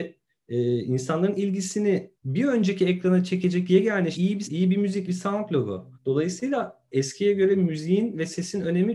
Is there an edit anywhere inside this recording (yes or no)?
yes